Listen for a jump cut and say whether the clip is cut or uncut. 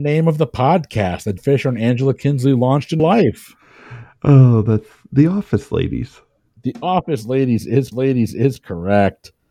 cut